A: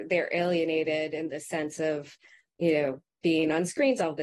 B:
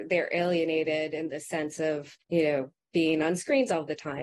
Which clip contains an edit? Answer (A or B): B